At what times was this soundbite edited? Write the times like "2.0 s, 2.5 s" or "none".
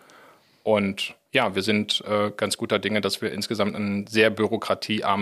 none